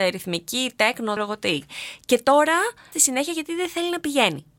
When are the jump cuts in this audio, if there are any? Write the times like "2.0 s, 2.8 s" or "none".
1.2 s, 2.9 s